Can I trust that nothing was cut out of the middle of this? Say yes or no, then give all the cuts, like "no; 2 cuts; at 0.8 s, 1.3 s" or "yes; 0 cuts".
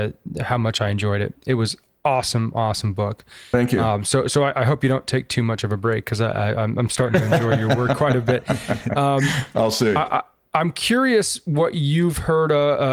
yes; 0 cuts